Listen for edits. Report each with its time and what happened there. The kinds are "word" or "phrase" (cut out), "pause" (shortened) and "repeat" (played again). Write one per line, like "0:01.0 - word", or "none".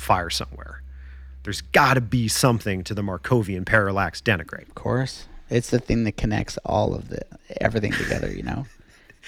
0:05.7 - word